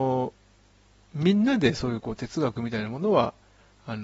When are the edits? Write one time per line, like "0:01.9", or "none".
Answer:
none